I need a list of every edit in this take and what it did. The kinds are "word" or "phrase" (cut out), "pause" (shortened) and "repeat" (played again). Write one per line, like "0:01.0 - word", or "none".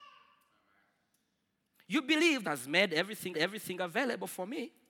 0:02.4 - phrase
0:03.3 - repeat

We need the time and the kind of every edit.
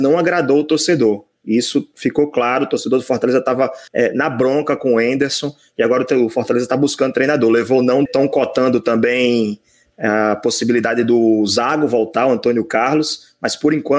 0:03.9 - pause
0:08.1 - phrase

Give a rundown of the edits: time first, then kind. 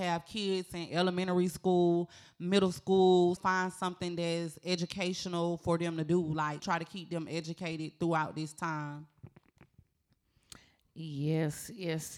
0:03.4 - word
0:06.6 - word

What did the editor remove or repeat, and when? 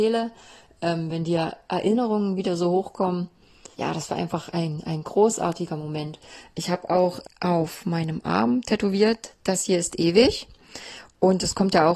0:03.7 - pause
0:07.2 - word

